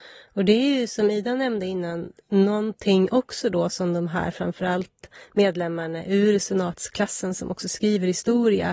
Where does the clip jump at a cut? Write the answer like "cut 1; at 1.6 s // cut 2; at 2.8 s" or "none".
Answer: cut 1; at 2.2 s

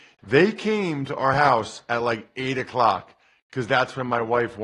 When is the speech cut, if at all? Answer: none

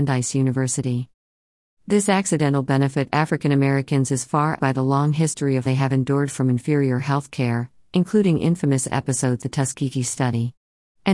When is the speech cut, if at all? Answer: cut 1; at 3.1 s // cut 2; at 4.6 s // cut 3; at 5.7 s // cut 4; at 9.4 s

